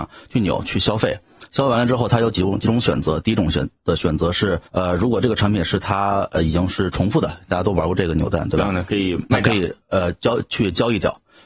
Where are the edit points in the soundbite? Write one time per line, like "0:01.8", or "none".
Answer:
0:04.7
0:09.8